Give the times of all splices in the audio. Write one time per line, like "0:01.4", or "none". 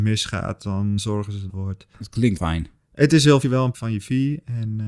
0:01.0
0:01.5
0:02.4
0:03.4
0:03.7